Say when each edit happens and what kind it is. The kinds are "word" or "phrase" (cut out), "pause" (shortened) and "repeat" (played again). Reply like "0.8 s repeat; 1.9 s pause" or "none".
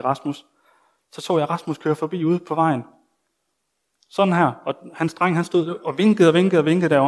none